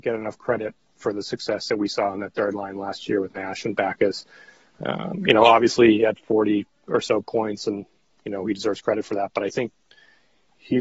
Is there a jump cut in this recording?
no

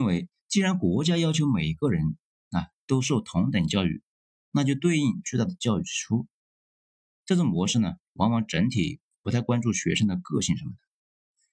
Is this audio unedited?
yes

